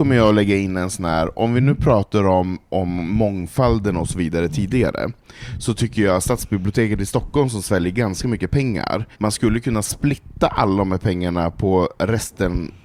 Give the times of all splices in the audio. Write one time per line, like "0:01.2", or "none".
0:09.1